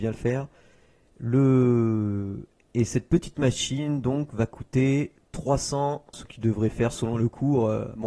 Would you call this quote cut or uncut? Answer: cut